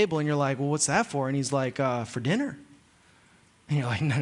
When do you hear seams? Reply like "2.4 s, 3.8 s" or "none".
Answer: none